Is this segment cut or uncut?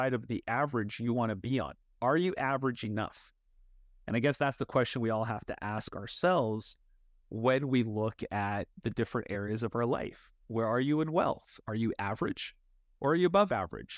uncut